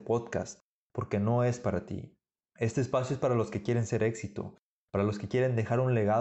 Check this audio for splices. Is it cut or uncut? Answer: uncut